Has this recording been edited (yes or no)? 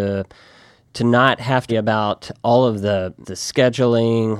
yes